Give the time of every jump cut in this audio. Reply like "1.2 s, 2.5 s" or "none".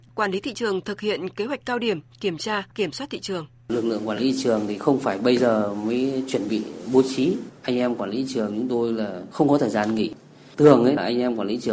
none